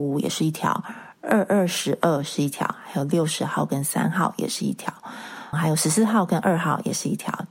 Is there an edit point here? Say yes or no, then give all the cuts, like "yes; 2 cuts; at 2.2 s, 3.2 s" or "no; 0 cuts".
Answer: yes; 1 cut; at 5.5 s